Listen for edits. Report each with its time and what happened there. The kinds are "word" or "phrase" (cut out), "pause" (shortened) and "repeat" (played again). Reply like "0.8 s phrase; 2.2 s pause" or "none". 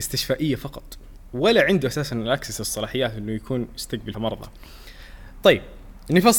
4.1 s word